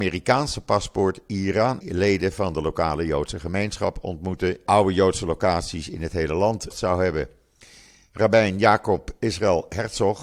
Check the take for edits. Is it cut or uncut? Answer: cut